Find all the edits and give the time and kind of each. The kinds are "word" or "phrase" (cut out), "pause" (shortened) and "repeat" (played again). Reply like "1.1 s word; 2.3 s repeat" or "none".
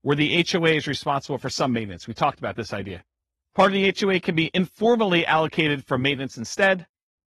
none